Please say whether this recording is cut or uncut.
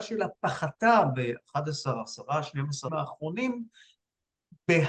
cut